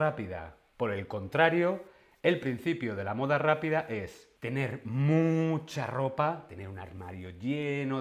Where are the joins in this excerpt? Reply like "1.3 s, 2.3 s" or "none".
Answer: 4.4 s